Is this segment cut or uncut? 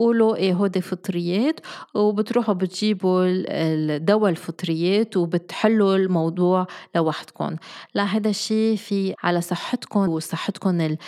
cut